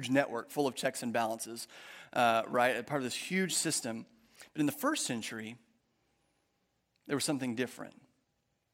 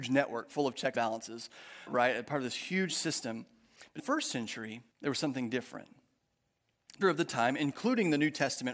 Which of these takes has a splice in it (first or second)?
second